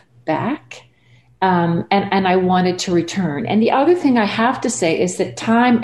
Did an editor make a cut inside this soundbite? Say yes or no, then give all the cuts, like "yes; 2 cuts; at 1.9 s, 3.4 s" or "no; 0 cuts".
no; 0 cuts